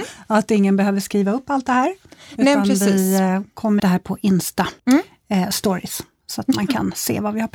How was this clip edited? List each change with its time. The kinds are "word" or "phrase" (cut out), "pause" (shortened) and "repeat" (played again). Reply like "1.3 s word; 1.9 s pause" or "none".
3.8 s phrase; 4.8 s pause